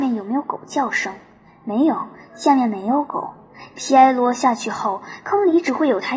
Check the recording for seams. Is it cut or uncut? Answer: uncut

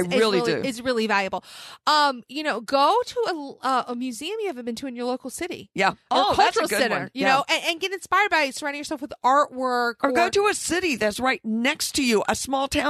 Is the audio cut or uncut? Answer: uncut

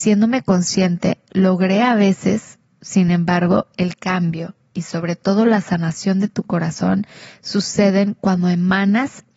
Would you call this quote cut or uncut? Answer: uncut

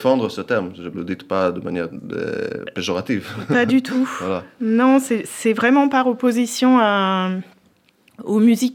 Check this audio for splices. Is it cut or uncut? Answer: cut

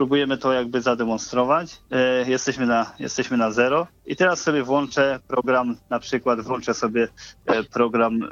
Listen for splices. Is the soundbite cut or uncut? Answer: cut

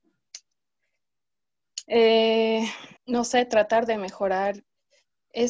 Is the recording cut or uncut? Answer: cut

